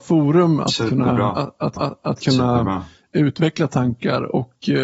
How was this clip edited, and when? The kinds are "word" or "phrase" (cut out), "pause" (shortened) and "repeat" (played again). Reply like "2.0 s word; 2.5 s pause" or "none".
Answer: 1.8 s repeat